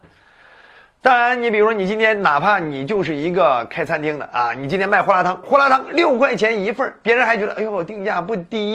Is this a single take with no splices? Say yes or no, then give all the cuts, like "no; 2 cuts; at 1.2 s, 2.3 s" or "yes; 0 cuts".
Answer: no; 1 cut; at 5.4 s